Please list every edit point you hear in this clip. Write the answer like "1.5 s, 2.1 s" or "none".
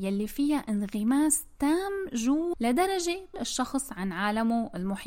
2.5 s, 3.3 s